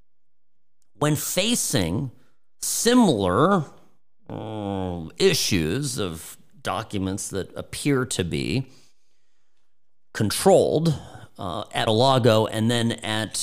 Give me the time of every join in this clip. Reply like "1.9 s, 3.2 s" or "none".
11.9 s